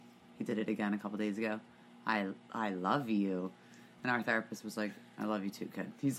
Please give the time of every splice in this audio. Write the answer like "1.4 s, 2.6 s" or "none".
none